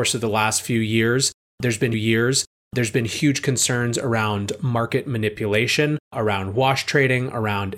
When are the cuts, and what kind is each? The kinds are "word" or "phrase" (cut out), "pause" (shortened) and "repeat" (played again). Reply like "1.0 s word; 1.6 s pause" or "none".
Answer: 1.9 s repeat; 6.0 s pause